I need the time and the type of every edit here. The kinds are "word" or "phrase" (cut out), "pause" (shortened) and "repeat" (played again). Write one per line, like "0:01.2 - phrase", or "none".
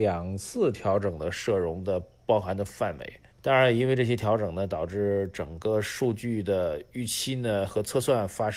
0:03.3 - pause